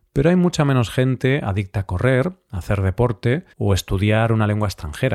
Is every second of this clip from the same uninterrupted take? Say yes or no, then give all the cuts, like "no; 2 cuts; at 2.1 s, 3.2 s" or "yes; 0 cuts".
no; 1 cut; at 3.5 s